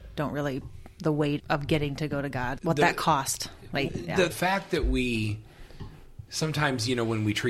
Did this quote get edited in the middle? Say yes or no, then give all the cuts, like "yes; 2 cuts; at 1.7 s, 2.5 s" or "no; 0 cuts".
yes; 4 cuts; at 1.4 s, 2.6 s, 3.9 s, 4.3 s